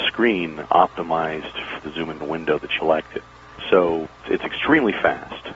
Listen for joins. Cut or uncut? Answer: cut